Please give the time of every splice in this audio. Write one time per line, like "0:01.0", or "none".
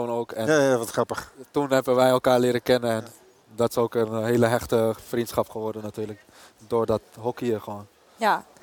none